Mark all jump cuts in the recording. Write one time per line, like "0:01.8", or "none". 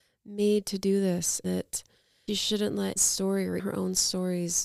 0:01.4
0:02.3
0:03.0
0:03.6